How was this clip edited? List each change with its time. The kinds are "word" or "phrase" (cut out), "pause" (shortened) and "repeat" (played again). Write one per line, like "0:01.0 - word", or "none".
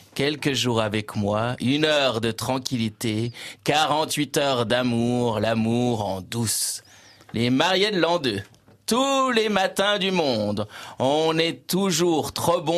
none